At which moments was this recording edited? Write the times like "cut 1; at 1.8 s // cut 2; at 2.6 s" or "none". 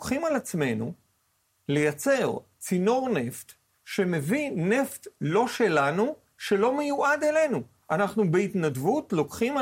none